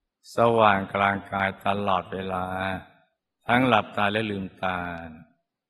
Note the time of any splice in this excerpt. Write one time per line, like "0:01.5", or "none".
0:03.2